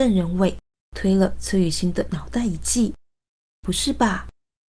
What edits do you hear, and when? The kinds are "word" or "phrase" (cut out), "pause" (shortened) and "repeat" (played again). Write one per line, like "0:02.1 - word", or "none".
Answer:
0:03.0 - pause